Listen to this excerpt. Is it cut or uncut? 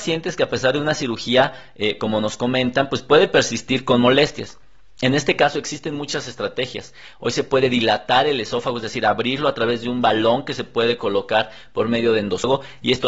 uncut